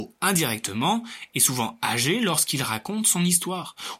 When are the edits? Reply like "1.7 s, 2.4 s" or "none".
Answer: none